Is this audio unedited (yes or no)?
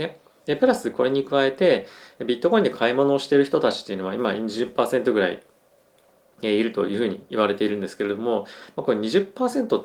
yes